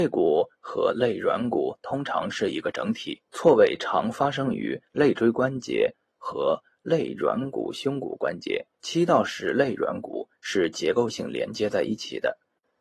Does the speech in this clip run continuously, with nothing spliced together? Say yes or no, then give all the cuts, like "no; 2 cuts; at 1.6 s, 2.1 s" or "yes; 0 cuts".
no; 2 cuts; at 3.3 s, 8.7 s